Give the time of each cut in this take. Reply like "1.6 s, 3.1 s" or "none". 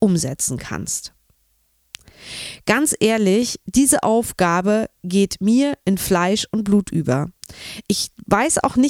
none